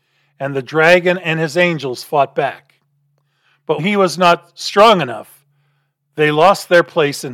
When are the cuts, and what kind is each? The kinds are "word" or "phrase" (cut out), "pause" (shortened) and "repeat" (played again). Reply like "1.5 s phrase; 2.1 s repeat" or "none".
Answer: 3.8 s word

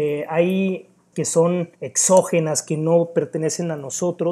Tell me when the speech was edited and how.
1.1 s word; 1.8 s pause

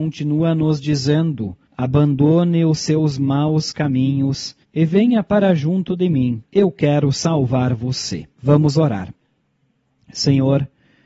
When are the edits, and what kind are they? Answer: 1.7 s pause; 4.6 s pause; 6.5 s pause; 8.3 s pause

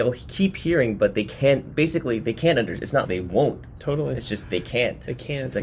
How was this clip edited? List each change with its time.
3.1 s word

